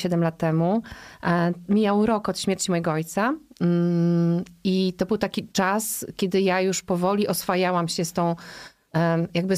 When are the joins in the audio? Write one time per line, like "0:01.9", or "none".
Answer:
0:05.5